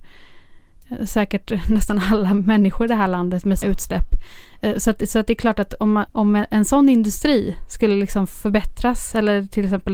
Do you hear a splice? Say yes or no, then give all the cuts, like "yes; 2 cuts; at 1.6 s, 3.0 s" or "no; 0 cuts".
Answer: yes; 2 cuts; at 3.6 s, 6.1 s